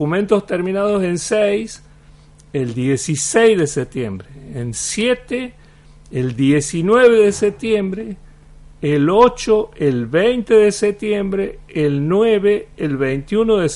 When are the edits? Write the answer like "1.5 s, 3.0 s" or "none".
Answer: none